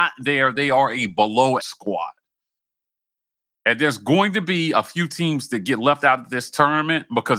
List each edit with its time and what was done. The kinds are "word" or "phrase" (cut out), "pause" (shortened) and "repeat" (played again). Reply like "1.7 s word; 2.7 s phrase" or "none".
1.6 s word

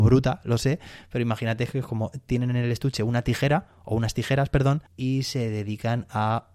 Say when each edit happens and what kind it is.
4.9 s pause

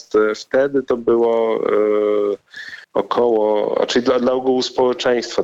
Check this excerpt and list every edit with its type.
2.8 s pause

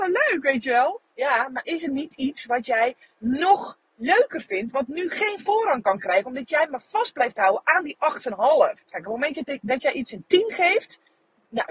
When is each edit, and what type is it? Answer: 1.1 s pause; 8.8 s pause

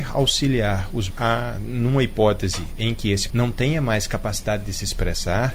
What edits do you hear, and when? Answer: 1.1 s word; 3.3 s word

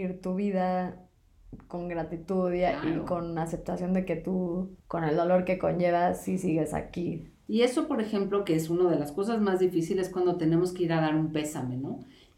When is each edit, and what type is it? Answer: 4.8 s pause

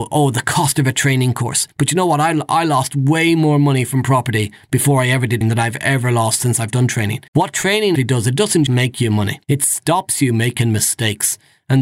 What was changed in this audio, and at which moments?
1.7 s pause; 5.4 s word; 7.3 s pause; 8.0 s word; 8.7 s word; 9.4 s pause

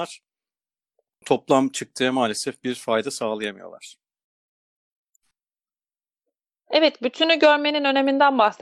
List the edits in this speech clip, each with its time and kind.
none

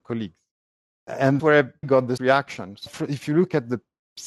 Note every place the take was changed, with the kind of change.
1.4 s word; 1.8 s word; 2.2 s word; 2.9 s word

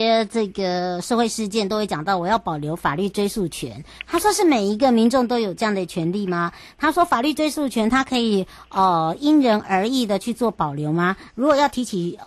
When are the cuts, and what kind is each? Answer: none

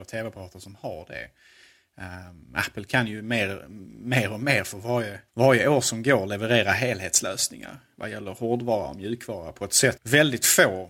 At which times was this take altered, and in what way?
5.3 s pause; 10.0 s word

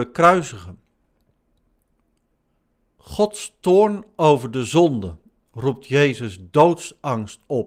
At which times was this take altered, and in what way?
none

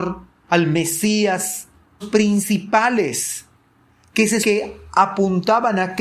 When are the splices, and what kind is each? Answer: 2.0 s word; 4.4 s word

